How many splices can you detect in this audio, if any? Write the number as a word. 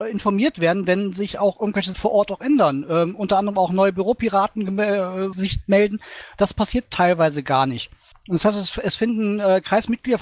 three